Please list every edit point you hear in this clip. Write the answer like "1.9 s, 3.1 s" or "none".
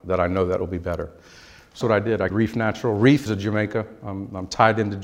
1.8 s, 2.3 s, 3.3 s